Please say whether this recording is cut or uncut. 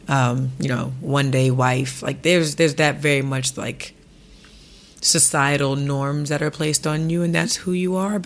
uncut